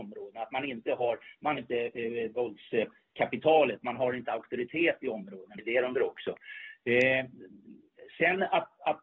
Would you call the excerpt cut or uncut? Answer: cut